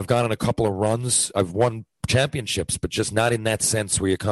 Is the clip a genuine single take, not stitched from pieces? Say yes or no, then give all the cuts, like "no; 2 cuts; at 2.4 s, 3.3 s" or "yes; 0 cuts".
yes; 0 cuts